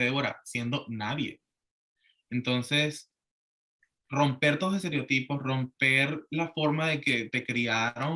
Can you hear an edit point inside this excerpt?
no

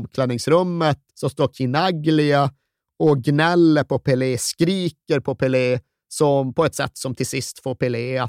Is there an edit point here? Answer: yes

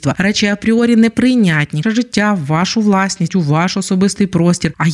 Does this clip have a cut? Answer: yes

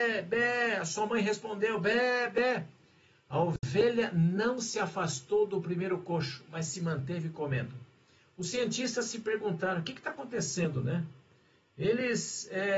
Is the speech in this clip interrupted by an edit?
no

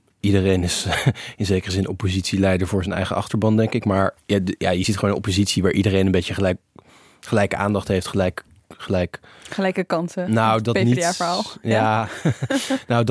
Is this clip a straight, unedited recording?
yes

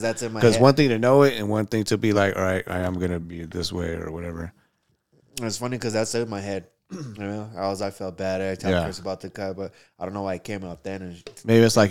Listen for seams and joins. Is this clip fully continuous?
yes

